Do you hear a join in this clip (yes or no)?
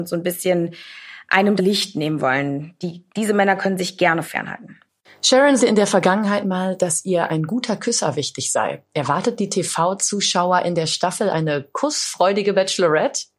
yes